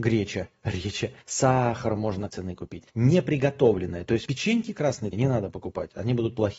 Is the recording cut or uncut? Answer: cut